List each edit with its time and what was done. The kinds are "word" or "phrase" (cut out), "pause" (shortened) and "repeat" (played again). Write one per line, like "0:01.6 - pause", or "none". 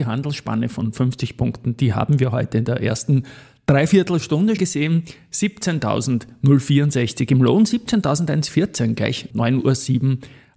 0:04.6 - word
0:09.3 - word